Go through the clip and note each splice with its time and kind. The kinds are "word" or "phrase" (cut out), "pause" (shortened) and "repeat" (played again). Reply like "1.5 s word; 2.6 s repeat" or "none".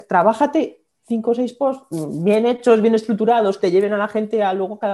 3.6 s word